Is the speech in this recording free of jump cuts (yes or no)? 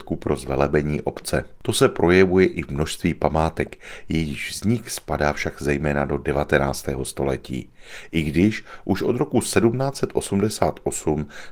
yes